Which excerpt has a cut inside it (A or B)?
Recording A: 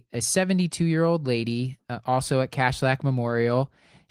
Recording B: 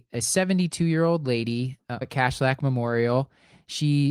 B